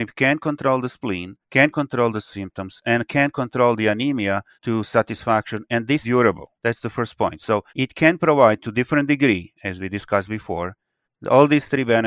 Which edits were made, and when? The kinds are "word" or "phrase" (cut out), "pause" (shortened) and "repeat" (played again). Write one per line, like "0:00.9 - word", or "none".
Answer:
0:01.4 - pause
0:04.5 - pause
0:06.0 - word
0:06.6 - pause
0:07.7 - pause
0:11.0 - pause